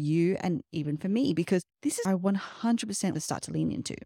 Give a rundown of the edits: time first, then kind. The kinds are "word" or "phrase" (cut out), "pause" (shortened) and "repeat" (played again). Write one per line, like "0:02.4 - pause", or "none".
0:01.7 - pause
0:02.1 - phrase
0:03.2 - word